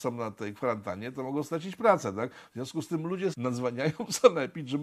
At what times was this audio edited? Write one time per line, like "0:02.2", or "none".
0:03.3